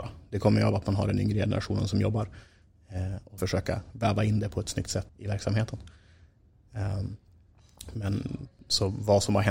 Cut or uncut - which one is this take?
cut